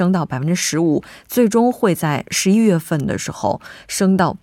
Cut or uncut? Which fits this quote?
uncut